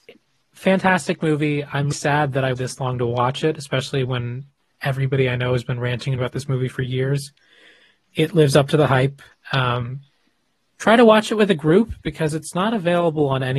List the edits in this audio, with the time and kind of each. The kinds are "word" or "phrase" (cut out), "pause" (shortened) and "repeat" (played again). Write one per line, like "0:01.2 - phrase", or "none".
0:01.9 - word
0:02.5 - word
0:06.2 - word